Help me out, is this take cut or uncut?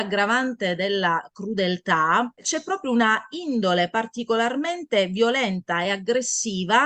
uncut